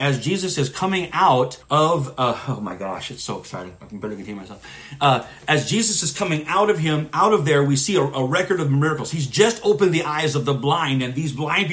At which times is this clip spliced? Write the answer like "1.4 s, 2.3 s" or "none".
1.6 s